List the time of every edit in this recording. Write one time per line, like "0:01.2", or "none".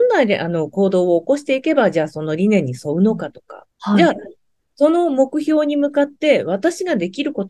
0:03.7